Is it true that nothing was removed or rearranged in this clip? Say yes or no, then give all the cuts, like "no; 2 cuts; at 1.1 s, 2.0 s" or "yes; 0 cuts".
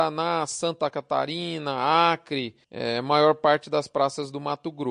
no; 1 cut; at 2.6 s